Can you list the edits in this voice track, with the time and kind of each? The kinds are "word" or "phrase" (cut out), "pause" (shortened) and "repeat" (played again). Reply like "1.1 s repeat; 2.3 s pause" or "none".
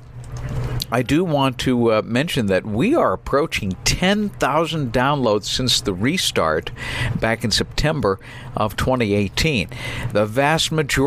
none